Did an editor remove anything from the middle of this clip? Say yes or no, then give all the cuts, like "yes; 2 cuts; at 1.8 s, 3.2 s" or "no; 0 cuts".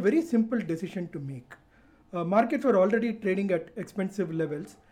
no; 0 cuts